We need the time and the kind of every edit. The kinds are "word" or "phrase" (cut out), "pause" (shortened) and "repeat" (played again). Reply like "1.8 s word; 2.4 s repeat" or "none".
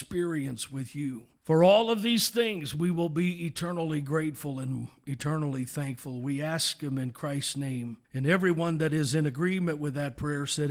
1.4 s pause; 8.0 s pause